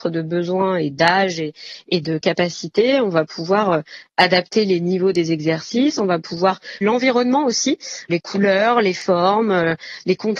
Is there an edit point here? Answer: yes; 2 cuts; at 6.8 s, 8.1 s

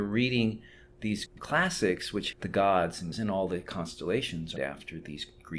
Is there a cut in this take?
yes; 4 cuts; at 1.3 s, 2.3 s, 3.1 s, 4.6 s

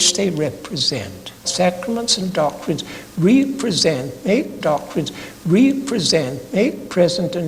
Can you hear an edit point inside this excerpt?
yes; 2 cuts; at 1.4 s, 4.6 s

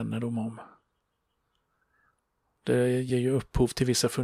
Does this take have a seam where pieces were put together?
no; 0 cuts

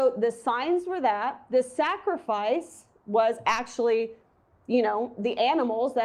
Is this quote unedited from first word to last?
yes; 0 cuts

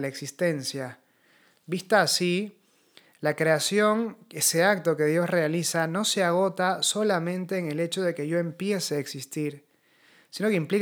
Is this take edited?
no; 0 cuts

